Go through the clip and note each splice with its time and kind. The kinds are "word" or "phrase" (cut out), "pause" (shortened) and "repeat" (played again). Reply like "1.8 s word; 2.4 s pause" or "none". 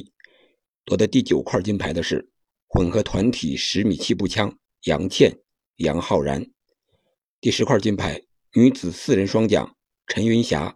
none